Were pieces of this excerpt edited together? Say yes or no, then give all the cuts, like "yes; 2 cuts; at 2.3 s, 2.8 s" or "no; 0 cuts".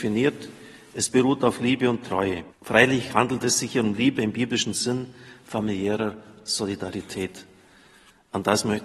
yes; 1 cut; at 2.5 s